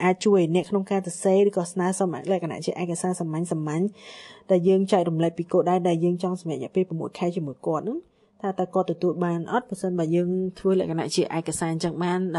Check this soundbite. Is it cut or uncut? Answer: uncut